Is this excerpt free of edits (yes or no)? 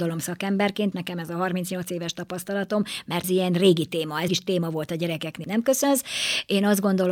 no